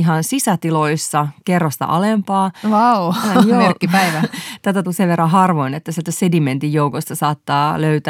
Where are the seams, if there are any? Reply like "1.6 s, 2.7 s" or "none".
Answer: 4.8 s